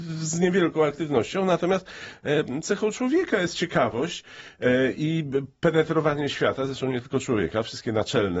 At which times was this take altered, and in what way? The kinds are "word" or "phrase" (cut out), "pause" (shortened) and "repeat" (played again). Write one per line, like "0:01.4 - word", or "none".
none